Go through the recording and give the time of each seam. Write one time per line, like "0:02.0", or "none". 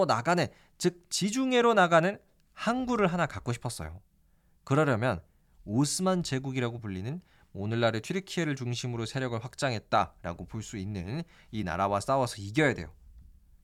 none